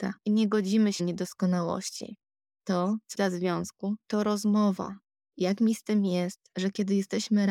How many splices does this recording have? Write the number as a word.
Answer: four